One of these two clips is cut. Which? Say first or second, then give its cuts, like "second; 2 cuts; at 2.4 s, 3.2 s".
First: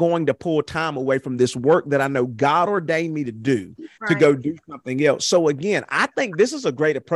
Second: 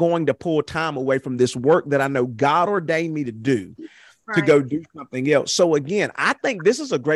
first; 1 cut; at 3.9 s